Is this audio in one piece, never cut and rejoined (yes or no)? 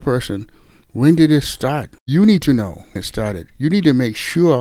no